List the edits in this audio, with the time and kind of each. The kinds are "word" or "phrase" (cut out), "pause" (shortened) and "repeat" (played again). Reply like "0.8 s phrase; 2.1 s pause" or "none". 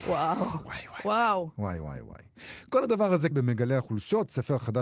3.3 s word